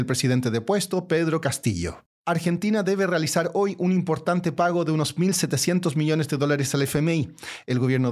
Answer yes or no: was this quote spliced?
yes